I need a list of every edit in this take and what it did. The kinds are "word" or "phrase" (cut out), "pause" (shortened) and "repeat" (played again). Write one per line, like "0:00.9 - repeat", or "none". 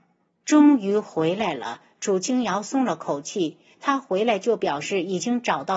none